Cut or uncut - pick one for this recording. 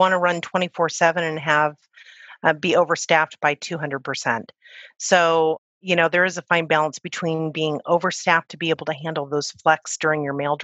uncut